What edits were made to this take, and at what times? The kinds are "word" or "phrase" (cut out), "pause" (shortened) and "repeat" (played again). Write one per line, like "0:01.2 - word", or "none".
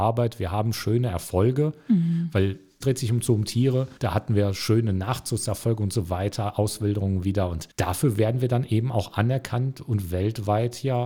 0:02.8 - phrase
0:04.0 - pause
0:07.7 - pause